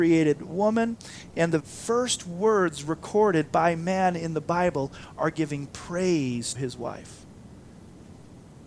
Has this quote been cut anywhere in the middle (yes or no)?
yes